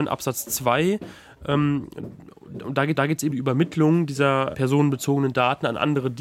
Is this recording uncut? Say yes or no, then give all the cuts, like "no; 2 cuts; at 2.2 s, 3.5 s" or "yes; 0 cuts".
no; 3 cuts; at 3.0 s, 3.3 s, 4.5 s